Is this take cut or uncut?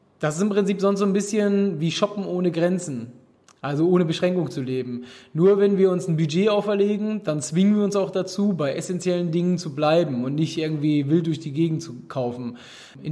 uncut